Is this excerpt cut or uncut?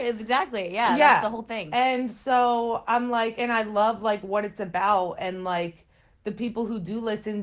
uncut